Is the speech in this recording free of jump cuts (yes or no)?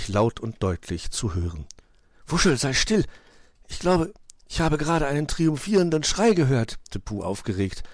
no